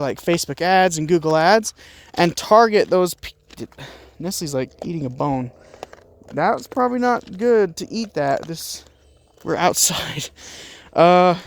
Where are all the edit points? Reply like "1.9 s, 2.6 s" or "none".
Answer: none